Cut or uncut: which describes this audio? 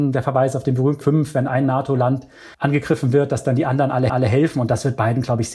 cut